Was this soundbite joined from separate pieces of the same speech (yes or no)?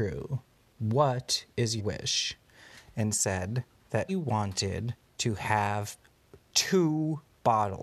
yes